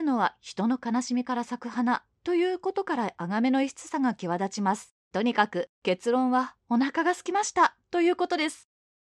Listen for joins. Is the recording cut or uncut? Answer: cut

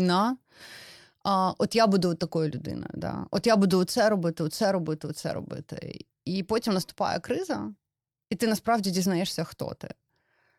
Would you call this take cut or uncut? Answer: uncut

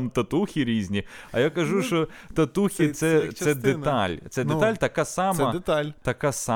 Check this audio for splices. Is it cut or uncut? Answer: uncut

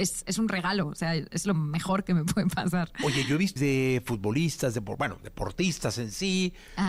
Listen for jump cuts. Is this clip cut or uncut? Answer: cut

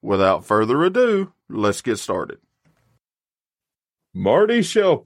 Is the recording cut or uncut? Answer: cut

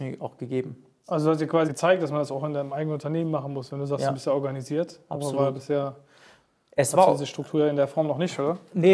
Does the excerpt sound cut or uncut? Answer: cut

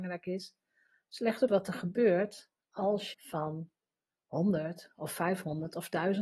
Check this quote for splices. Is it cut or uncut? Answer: cut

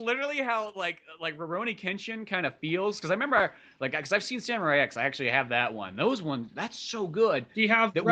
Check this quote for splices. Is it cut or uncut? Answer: uncut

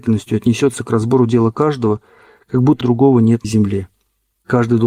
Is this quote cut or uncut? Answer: cut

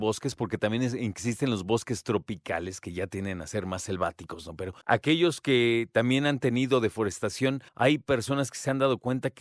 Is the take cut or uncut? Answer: cut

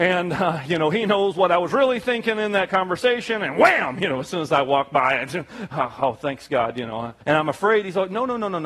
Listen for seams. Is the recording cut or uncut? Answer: cut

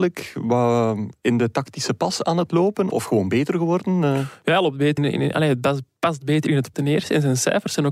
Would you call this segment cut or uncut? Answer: cut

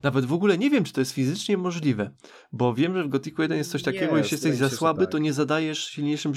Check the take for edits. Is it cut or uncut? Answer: uncut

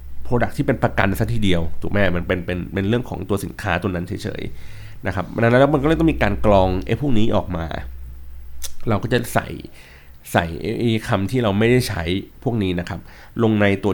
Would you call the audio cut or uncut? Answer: cut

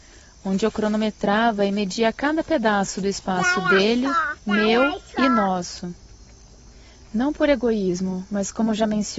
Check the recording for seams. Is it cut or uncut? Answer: cut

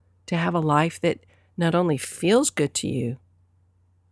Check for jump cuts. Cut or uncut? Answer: uncut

